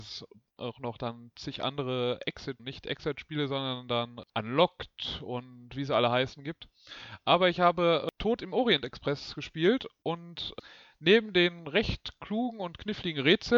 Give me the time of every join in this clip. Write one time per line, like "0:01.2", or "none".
0:02.6
0:04.3